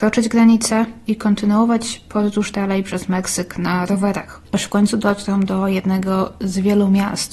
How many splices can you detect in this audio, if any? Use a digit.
1